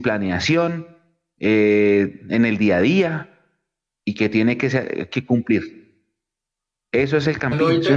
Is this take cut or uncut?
uncut